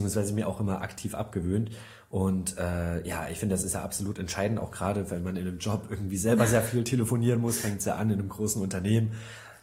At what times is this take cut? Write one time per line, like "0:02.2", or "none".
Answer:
none